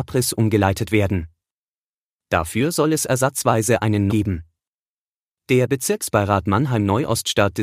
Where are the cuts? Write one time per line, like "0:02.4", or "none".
0:04.1